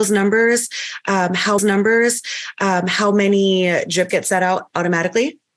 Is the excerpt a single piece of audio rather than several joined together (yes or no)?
no